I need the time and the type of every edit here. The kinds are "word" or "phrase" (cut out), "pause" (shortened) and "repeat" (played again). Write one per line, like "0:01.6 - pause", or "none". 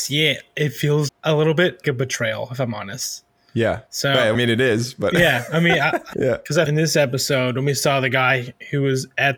0:01.1 - word
0:01.8 - word
0:03.9 - pause
0:04.3 - word
0:06.1 - word
0:06.7 - phrase